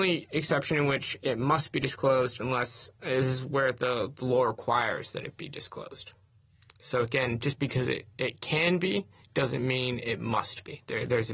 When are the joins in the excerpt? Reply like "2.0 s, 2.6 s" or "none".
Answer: none